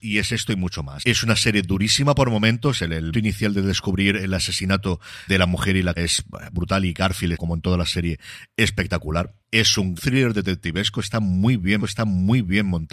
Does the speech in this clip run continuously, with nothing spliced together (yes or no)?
no